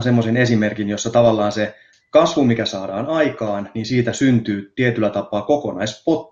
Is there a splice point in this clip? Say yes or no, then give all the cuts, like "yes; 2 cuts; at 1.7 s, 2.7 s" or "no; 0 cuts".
no; 0 cuts